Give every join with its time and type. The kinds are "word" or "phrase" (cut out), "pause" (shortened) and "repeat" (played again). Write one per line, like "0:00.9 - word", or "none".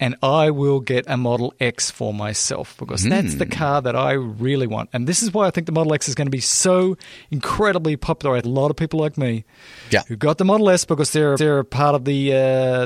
0:08.4 - phrase
0:11.4 - repeat